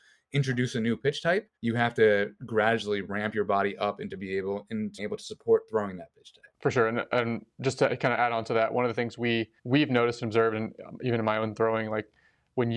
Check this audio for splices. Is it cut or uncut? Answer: cut